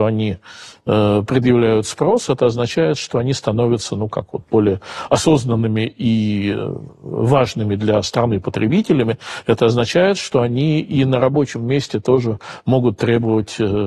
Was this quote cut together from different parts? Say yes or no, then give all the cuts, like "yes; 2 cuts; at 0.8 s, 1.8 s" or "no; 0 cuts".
no; 0 cuts